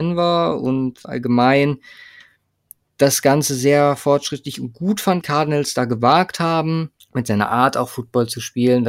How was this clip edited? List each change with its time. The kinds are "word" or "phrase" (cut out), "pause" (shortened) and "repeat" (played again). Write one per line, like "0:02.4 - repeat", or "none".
0:01.0 - word
0:05.2 - phrase
0:07.0 - pause